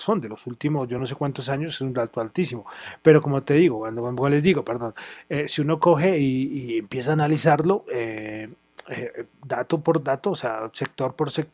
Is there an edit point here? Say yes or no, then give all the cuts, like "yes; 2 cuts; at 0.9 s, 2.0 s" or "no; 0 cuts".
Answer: no; 0 cuts